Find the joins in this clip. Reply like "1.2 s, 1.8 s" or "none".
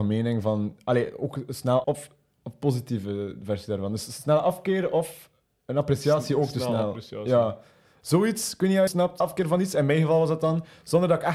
1.8 s, 5.5 s, 8.9 s, 9.2 s